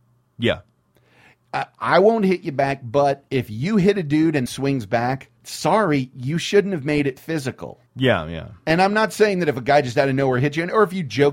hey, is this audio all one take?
no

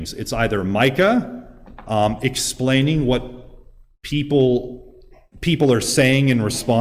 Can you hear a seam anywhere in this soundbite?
no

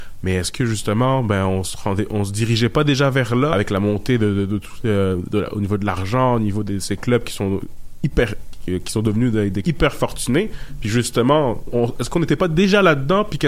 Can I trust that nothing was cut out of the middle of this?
no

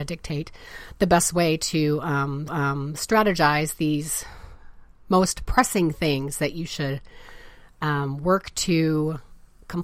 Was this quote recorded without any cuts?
no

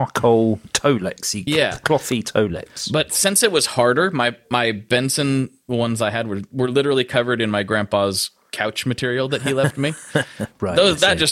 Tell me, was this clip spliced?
no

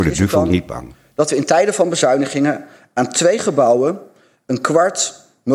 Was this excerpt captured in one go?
yes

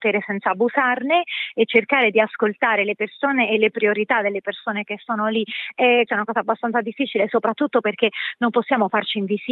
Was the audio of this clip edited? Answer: yes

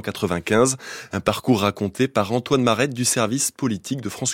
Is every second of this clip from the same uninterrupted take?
yes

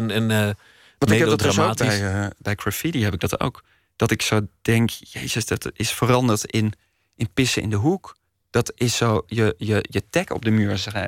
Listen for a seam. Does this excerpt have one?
no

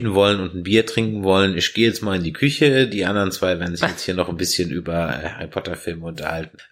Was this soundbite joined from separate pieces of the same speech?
no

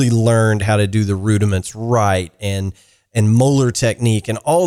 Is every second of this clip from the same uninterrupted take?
yes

